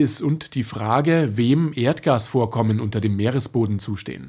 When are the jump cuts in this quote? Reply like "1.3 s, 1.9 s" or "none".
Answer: none